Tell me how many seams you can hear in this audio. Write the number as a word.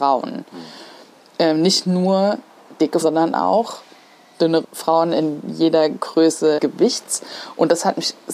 three